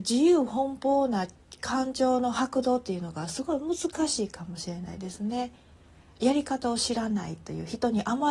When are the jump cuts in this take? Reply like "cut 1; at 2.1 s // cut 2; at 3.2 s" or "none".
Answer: none